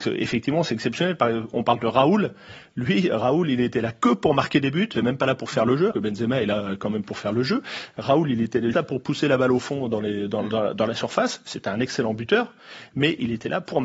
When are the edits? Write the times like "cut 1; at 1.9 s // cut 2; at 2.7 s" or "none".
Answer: cut 1; at 4.9 s // cut 2; at 5.9 s // cut 3; at 8.7 s